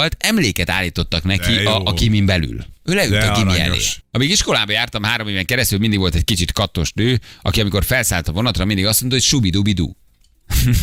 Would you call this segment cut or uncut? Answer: uncut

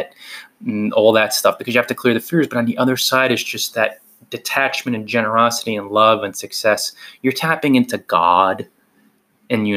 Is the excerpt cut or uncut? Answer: uncut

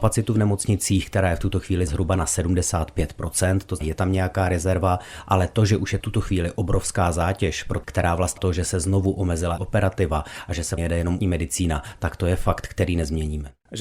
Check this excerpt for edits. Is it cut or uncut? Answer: cut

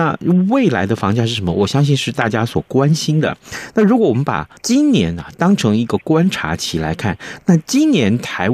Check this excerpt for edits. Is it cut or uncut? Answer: cut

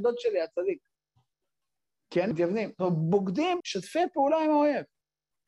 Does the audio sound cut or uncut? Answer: cut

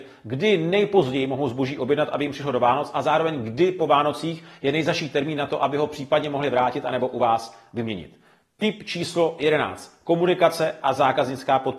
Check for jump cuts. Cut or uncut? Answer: uncut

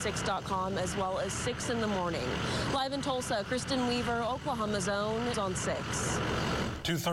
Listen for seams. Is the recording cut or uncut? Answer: cut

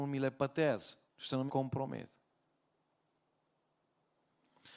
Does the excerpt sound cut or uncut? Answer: cut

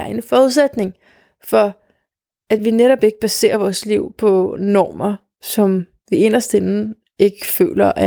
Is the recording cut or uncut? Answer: uncut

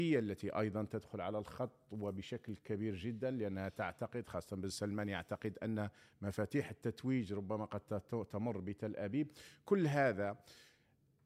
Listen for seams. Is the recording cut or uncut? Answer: uncut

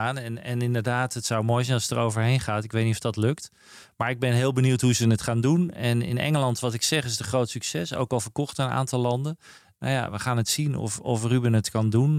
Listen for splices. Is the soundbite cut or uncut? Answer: uncut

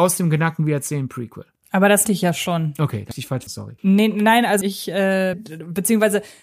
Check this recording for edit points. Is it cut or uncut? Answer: cut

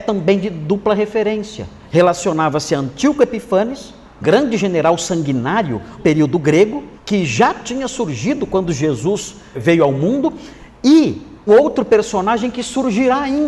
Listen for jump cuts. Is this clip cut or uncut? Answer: cut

